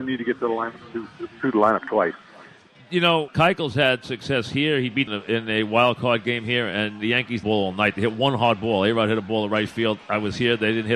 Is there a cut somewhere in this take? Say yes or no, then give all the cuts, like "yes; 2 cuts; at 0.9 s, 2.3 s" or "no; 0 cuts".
yes; 3 cuts; at 3.3 s, 5.1 s, 7.4 s